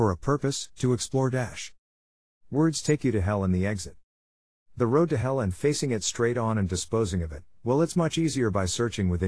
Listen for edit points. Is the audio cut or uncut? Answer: uncut